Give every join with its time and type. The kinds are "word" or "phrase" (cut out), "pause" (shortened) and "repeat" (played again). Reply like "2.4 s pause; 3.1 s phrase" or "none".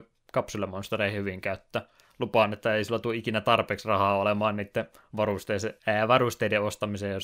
5.8 s pause